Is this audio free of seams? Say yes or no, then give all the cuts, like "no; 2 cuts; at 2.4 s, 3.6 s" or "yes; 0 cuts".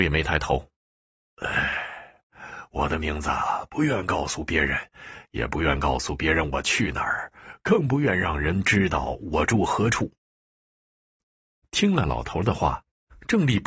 yes; 0 cuts